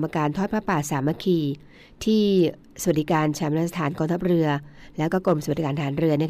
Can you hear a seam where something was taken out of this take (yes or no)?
no